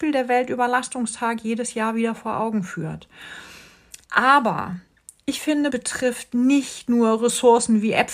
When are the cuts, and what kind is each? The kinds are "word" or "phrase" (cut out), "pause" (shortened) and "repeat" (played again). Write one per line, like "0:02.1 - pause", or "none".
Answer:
0:04.0 - pause
0:05.7 - word